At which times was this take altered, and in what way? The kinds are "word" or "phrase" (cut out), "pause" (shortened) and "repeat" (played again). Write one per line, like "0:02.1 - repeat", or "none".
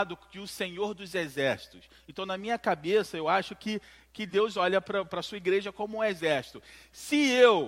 none